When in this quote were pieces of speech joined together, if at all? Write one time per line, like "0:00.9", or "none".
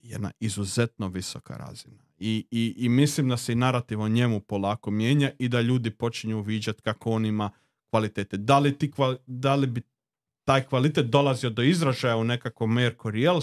none